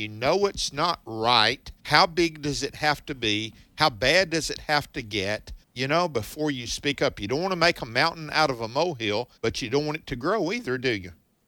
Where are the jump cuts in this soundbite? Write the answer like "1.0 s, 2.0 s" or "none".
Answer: 1.8 s, 5.6 s, 9.4 s